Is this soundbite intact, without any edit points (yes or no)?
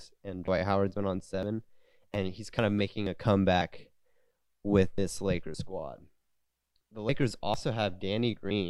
yes